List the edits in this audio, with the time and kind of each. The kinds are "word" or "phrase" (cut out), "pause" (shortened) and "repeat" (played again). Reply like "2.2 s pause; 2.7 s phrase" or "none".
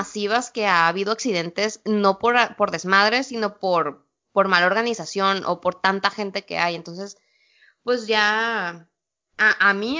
none